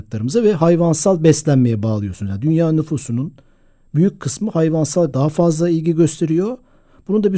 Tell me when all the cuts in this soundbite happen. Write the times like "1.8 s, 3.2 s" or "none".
5.1 s